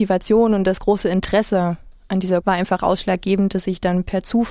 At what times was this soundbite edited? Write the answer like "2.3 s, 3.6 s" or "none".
2.4 s